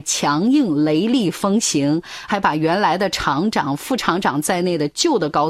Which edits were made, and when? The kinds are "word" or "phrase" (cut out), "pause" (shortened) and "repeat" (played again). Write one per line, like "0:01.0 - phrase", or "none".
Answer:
0:02.3 - phrase